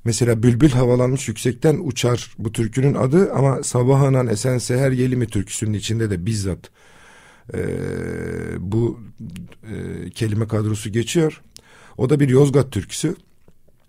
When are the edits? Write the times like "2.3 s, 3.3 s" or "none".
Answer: none